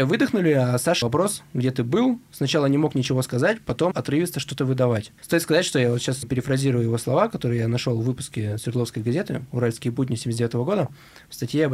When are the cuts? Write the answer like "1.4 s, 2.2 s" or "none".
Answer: 1.0 s, 3.9 s, 5.2 s, 6.2 s

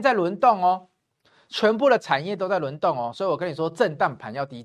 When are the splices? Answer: none

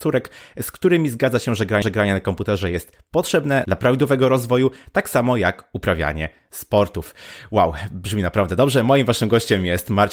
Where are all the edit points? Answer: 1.8 s

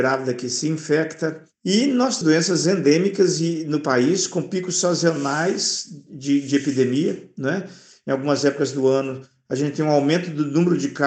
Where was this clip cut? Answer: 2.2 s

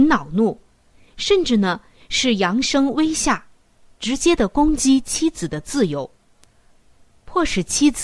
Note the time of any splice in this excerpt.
none

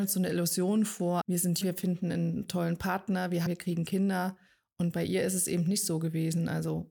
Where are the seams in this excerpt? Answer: 1.2 s, 1.6 s, 3.5 s

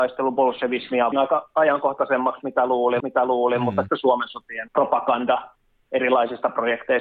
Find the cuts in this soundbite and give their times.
1.1 s, 3.0 s, 3.9 s, 4.7 s

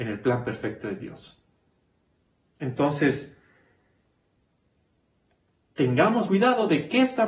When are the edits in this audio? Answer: 6.3 s

